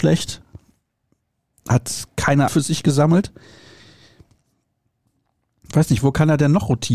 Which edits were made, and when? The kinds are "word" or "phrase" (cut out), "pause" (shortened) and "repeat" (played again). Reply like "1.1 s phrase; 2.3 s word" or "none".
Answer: 2.5 s word